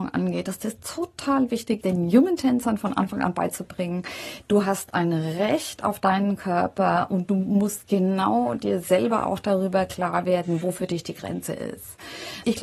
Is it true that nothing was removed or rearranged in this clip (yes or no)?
no